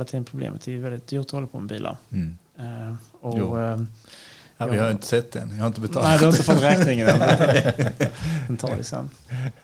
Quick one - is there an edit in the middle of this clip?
no; 0 cuts

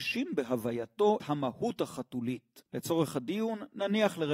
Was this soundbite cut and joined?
yes; 2 cuts; at 1.2 s, 2.7 s

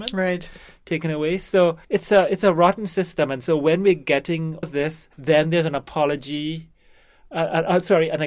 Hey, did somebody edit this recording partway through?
yes; 3 cuts; at 1.8 s, 4.6 s, 5.1 s

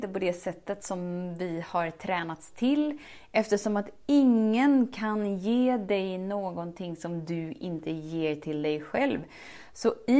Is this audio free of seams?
yes; 0 cuts

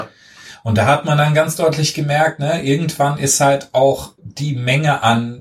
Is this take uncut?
no; 1 cut; at 4.2 s

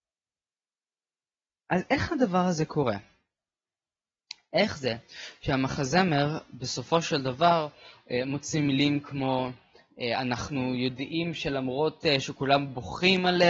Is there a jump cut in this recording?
no; 0 cuts

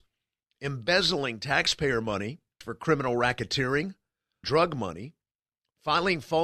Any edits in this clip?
yes; 2 cuts; at 2.6 s, 4.4 s

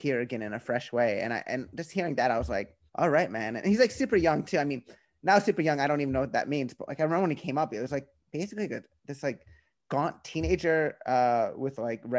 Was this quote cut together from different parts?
yes; 1 cut; at 2.9 s

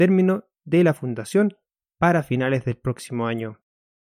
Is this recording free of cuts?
yes; 0 cuts

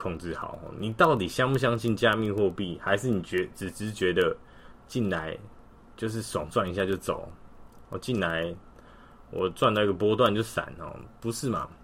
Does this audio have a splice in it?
no; 0 cuts

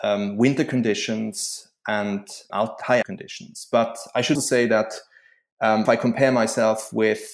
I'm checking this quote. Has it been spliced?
yes; 4 cuts; at 2.5 s, 3.0 s, 4.4 s, 5.9 s

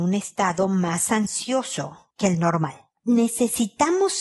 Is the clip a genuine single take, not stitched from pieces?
yes; 0 cuts

